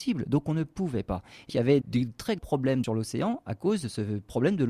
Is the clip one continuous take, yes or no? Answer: no